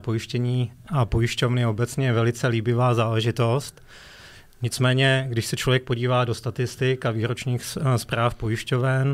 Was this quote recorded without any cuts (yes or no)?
yes